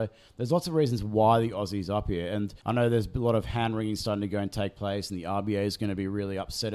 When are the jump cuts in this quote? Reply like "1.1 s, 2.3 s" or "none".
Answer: 2.6 s

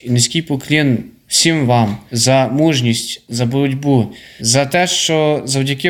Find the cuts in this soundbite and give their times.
none

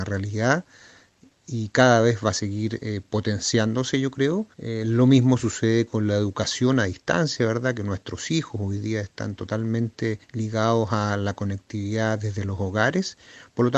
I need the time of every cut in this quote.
4.5 s, 10.2 s

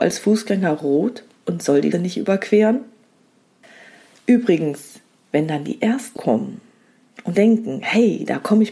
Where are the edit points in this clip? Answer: 1.9 s, 6.2 s, 7.3 s

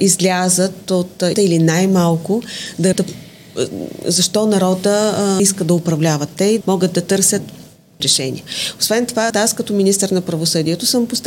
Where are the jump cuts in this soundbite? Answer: 1.3 s, 2.9 s, 5.4 s, 6.6 s, 8.0 s, 9.3 s

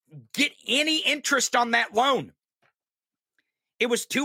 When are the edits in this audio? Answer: none

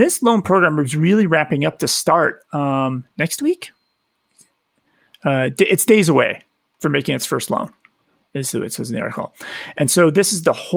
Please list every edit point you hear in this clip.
none

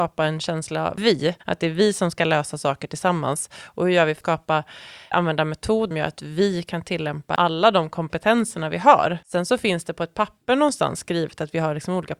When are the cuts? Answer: 1.4 s, 4.2 s, 5.1 s, 5.9 s, 9.2 s

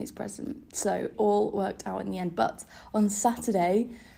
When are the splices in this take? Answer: 1.1 s

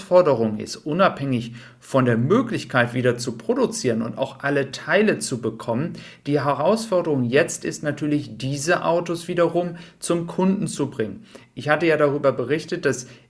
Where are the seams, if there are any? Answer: none

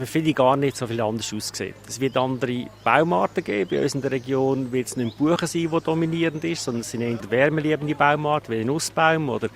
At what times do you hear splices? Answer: 7.2 s

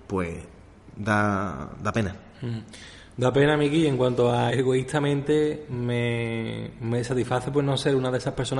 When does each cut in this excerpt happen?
4.5 s

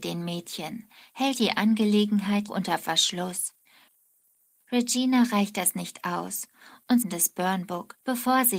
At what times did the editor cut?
2.5 s, 7.0 s

